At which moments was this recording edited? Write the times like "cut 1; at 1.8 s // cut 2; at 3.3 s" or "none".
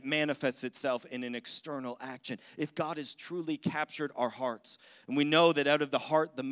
none

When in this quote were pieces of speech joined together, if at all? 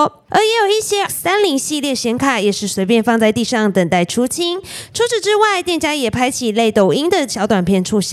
cut 1; at 1.1 s

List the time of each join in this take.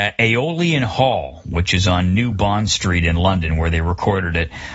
none

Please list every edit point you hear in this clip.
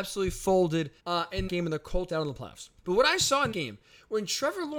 cut 1; at 1.0 s // cut 2; at 1.5 s // cut 3; at 2.1 s // cut 4; at 2.8 s // cut 5; at 3.5 s

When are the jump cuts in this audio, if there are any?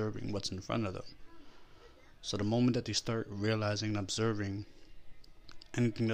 none

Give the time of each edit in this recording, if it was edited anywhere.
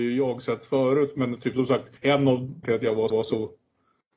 cut 1; at 2.0 s // cut 2; at 2.6 s // cut 3; at 3.1 s

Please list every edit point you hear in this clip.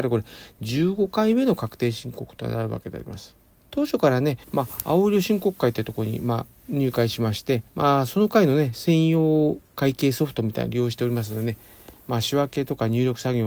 cut 1; at 3.6 s // cut 2; at 4.4 s // cut 3; at 6.6 s // cut 4; at 7.7 s // cut 5; at 9.6 s

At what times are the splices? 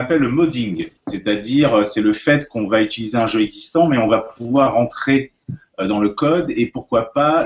cut 1; at 1.0 s

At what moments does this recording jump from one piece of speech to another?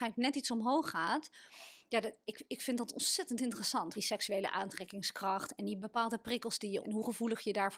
cut 1; at 4.0 s // cut 2; at 6.8 s

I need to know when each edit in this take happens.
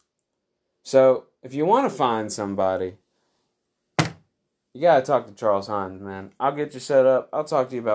none

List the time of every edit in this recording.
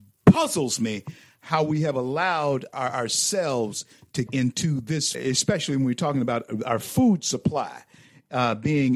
cut 1; at 2.7 s // cut 2; at 4.3 s // cut 3; at 5.1 s

